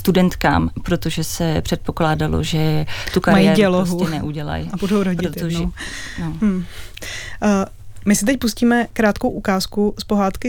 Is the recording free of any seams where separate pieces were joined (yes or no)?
yes